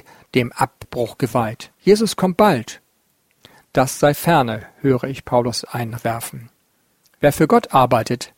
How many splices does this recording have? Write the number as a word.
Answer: two